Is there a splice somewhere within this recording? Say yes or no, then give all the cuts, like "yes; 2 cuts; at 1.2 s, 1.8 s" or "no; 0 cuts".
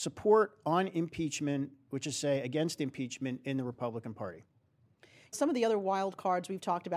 yes; 1 cut; at 5.3 s